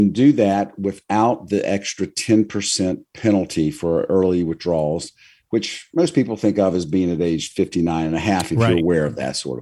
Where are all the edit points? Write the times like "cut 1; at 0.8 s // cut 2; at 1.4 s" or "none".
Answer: none